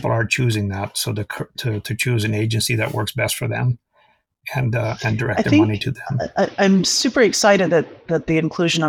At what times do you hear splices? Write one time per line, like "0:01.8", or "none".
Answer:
none